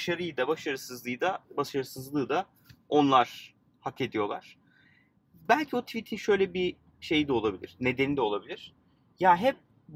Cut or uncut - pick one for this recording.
uncut